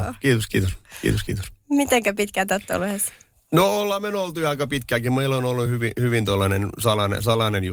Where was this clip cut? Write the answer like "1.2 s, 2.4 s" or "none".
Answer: none